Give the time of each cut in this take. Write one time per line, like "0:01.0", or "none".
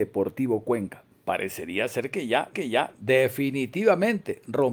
0:02.5